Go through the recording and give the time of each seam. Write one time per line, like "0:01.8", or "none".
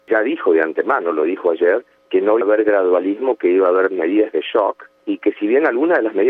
0:02.4